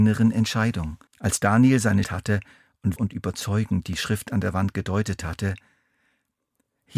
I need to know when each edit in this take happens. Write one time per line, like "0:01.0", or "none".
0:01.1
0:02.0
0:03.0